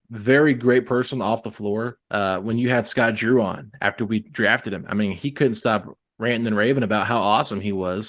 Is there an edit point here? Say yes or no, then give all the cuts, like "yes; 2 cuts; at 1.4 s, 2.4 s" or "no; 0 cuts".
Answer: yes; 1 cut; at 2.0 s